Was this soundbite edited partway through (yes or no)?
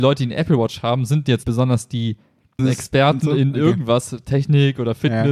yes